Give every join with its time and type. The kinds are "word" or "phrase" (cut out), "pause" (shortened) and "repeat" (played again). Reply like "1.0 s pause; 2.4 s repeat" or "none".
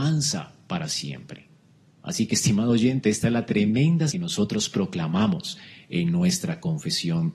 4.1 s word